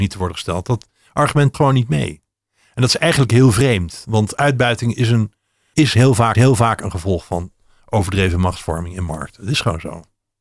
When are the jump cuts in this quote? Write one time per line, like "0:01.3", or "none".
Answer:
0:01.5
0:05.7
0:06.3